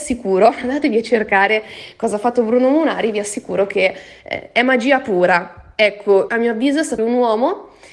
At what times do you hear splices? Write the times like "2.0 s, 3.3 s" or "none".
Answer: 6.3 s, 7.0 s